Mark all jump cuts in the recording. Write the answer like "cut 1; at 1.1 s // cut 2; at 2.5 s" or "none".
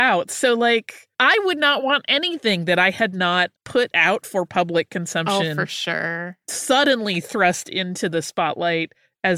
cut 1; at 1.1 s // cut 2; at 3.6 s